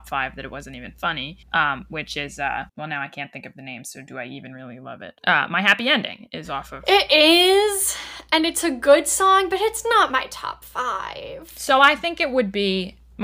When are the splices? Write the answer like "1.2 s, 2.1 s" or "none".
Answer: 1.4 s, 2.7 s, 5.2 s